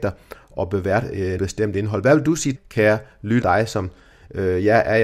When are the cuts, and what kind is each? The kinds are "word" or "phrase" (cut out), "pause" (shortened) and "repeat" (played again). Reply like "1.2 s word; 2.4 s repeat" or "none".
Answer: 1.4 s word; 2.5 s word; 3.4 s word